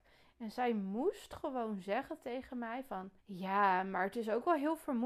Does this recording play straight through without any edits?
no; 1 cut; at 3.2 s

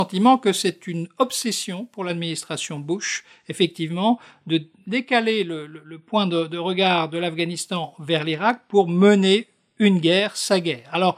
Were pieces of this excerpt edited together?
no; 0 cuts

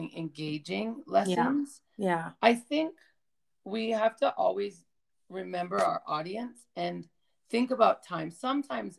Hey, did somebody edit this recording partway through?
no; 0 cuts

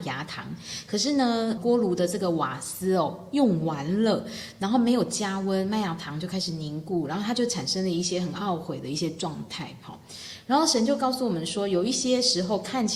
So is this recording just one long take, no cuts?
no; 1 cut; at 1.6 s

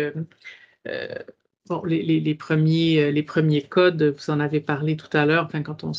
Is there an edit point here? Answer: no; 0 cuts

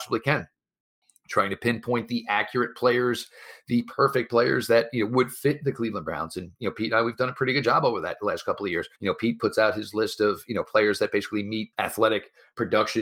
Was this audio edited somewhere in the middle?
yes; 2 cuts; at 8.9 s, 11.7 s

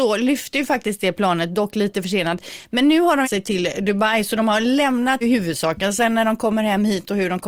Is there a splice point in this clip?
yes; 2 cuts; at 3.2 s, 5.2 s

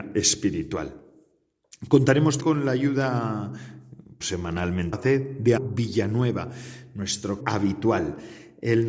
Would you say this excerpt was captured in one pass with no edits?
no; 5 cuts; at 2.4 s, 4.2 s, 4.9 s, 5.6 s, 7.4 s

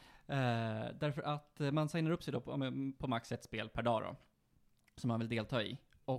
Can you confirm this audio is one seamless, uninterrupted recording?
yes; 0 cuts

